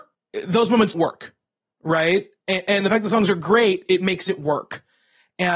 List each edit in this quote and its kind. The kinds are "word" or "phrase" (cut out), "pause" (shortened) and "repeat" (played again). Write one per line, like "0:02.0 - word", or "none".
0:00.9 - word
0:03.9 - word